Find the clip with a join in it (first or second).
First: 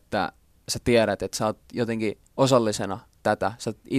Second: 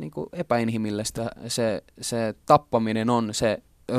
first